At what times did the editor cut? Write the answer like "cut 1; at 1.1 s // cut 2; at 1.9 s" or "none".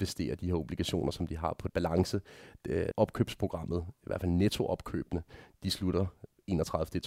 cut 1; at 1.7 s // cut 2; at 2.9 s